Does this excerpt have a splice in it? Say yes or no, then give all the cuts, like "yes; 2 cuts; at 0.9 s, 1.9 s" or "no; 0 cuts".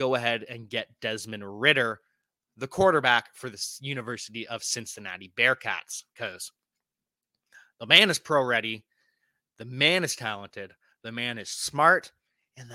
no; 0 cuts